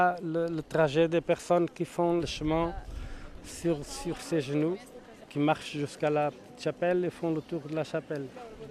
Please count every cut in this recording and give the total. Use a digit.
0